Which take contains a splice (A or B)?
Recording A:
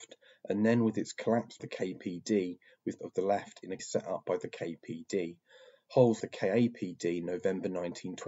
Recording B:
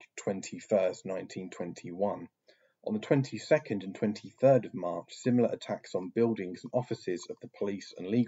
A